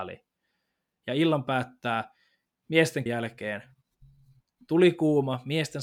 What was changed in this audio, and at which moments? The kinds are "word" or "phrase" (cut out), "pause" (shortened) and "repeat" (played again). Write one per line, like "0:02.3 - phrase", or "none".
0:03.1 - word